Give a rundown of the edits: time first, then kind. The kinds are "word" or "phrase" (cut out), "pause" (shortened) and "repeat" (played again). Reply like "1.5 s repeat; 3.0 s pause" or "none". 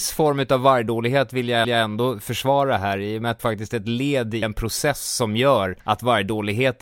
1.6 s repeat; 3.4 s phrase; 4.4 s word; 5.8 s pause